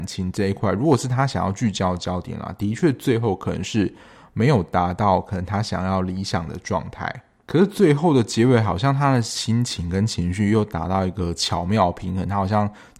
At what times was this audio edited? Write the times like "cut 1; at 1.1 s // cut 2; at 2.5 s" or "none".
none